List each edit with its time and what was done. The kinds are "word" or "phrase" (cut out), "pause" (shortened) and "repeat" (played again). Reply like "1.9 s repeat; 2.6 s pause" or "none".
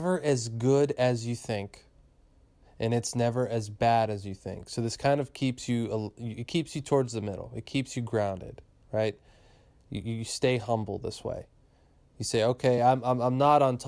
none